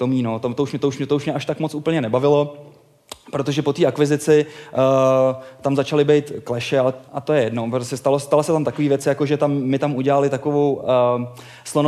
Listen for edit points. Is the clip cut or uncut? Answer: cut